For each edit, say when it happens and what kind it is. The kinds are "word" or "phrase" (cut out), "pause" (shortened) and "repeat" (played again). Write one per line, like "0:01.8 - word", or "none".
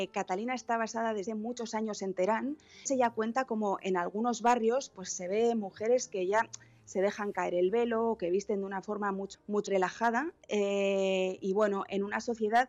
0:01.3 - word
0:02.9 - word
0:09.3 - word
0:09.7 - word
0:11.4 - word